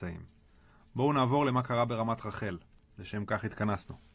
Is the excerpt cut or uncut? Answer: uncut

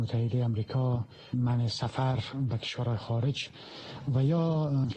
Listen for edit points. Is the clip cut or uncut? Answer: cut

